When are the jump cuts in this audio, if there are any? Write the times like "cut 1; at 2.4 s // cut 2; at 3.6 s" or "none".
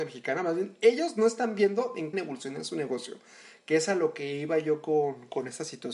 cut 1; at 2.1 s